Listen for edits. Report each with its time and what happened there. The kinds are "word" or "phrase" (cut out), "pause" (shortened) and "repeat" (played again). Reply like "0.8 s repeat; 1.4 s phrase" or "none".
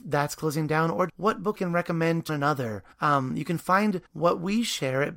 1.1 s word; 1.6 s word; 2.3 s word; 2.9 s pause; 4.1 s pause